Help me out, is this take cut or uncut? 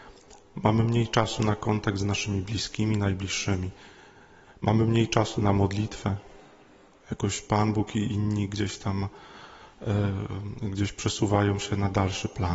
uncut